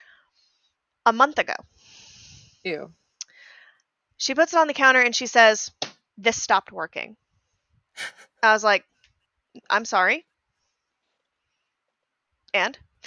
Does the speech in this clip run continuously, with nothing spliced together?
yes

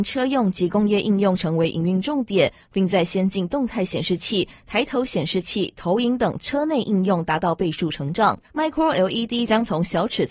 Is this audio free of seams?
no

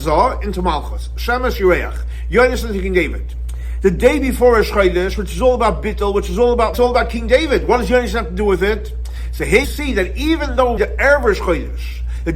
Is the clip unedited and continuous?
no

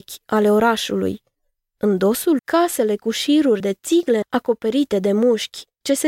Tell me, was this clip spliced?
yes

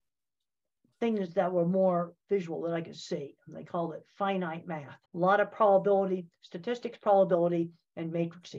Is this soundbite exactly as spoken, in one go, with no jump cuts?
no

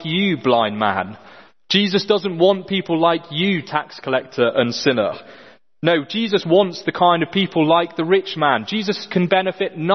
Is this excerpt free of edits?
yes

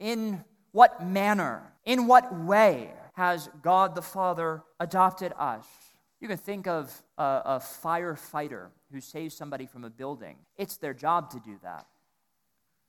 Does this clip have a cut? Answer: yes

